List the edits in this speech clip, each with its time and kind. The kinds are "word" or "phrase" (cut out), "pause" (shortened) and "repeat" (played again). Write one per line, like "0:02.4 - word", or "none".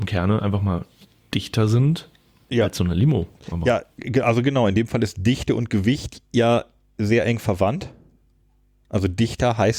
none